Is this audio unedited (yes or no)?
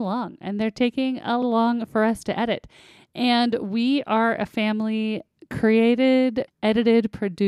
no